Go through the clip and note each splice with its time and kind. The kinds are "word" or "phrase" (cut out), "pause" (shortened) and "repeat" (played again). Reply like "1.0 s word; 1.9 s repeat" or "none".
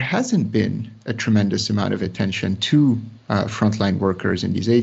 none